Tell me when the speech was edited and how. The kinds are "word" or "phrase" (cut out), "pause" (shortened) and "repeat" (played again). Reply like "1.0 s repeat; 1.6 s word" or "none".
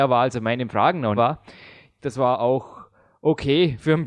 1.2 s word; 2.0 s word